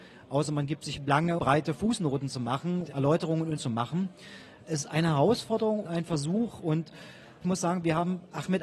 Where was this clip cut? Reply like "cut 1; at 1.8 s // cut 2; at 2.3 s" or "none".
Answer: cut 1; at 1.0 s // cut 2; at 1.4 s // cut 3; at 2.9 s // cut 4; at 3.6 s // cut 5; at 4.8 s // cut 6; at 5.8 s // cut 7; at 7.4 s